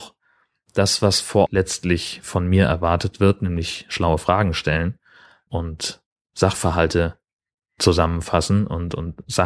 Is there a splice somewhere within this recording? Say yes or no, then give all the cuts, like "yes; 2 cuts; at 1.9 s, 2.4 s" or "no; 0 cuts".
yes; 3 cuts; at 1.5 s, 5.5 s, 7.3 s